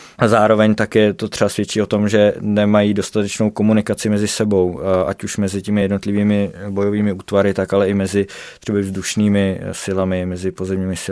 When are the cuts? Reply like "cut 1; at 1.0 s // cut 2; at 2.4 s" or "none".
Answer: none